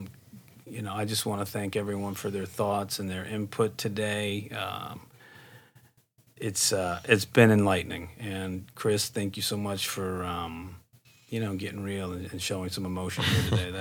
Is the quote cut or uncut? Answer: uncut